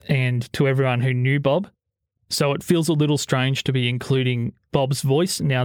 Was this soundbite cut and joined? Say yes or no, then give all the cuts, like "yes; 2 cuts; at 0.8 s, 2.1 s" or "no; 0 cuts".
no; 0 cuts